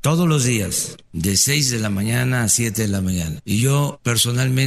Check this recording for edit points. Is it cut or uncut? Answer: uncut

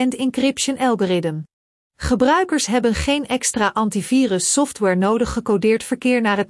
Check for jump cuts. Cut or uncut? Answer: cut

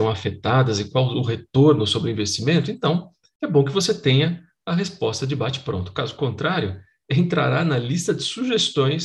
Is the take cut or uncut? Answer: uncut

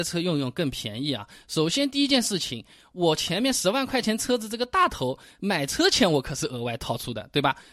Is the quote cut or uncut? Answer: uncut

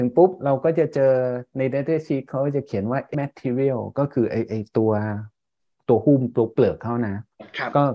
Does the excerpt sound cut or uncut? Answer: cut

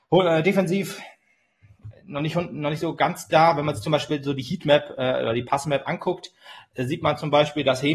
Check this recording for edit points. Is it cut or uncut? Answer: uncut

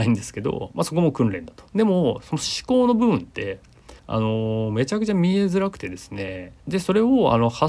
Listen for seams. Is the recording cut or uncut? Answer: cut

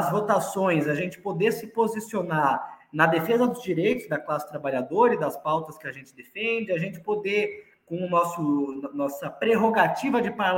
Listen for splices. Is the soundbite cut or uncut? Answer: uncut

